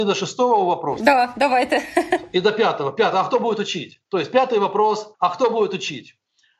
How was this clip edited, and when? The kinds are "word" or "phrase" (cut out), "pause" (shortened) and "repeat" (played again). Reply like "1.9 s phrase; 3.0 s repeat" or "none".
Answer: 4.1 s pause; 5.1 s pause